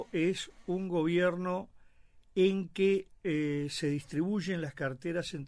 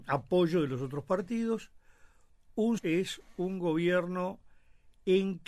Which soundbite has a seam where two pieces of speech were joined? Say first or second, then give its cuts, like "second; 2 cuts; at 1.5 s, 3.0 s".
second; 1 cut; at 2.8 s